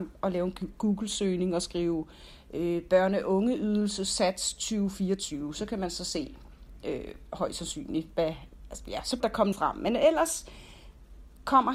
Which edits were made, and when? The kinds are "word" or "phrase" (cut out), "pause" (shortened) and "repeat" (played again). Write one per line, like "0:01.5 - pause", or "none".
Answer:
0:09.2 - phrase
0:09.5 - word